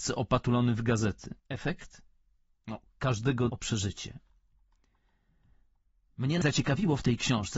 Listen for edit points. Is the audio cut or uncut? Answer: cut